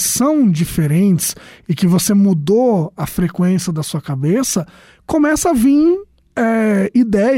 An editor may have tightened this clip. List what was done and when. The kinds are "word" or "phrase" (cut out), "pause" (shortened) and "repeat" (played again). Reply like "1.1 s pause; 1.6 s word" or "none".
none